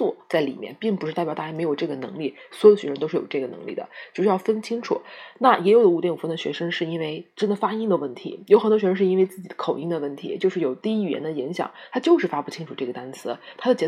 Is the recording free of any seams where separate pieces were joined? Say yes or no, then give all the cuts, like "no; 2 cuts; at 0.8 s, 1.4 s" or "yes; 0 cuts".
yes; 0 cuts